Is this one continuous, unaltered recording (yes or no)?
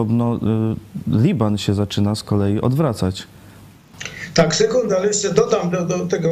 yes